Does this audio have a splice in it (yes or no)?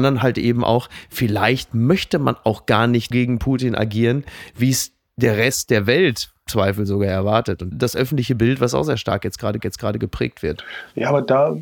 yes